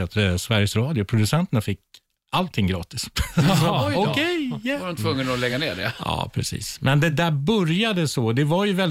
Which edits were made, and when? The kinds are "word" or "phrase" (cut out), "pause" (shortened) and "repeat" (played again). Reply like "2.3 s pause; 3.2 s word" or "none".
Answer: none